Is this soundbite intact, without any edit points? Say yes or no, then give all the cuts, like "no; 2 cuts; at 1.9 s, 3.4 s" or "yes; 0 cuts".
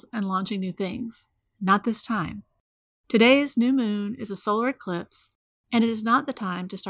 yes; 0 cuts